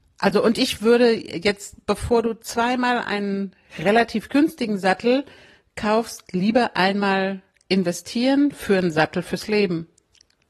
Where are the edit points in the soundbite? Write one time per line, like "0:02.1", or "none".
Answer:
none